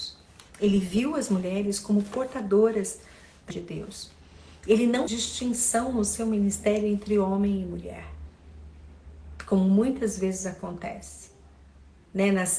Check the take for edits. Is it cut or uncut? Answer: cut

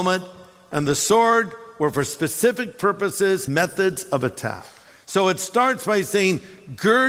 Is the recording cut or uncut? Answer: cut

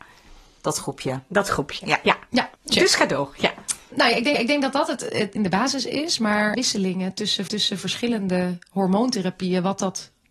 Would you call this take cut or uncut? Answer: cut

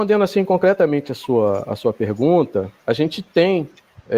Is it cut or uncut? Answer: cut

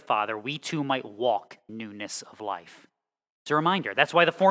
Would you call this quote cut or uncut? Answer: cut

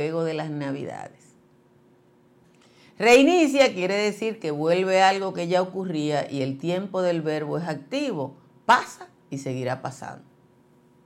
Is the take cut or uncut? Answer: uncut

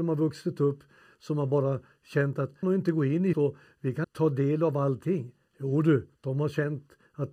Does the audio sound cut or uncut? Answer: cut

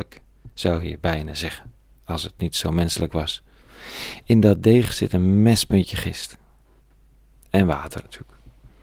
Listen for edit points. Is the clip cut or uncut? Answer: uncut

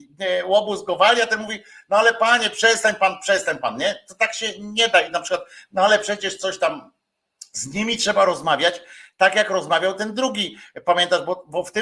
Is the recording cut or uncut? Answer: uncut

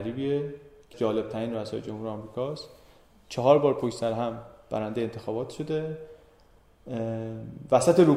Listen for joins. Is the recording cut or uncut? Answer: cut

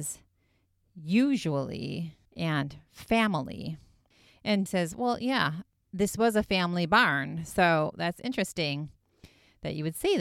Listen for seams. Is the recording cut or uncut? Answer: cut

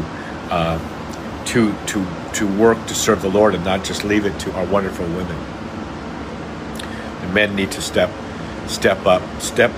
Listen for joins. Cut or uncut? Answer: cut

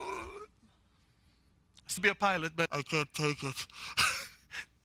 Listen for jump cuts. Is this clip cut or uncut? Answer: cut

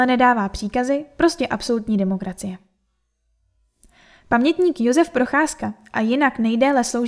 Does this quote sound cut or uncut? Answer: uncut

